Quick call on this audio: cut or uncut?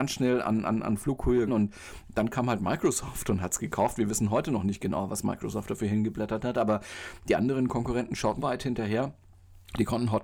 cut